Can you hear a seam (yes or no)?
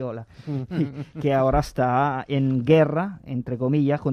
no